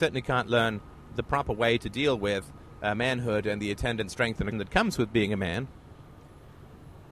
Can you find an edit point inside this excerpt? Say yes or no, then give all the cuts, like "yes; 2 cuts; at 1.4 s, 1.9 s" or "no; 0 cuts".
yes; 1 cut; at 4.5 s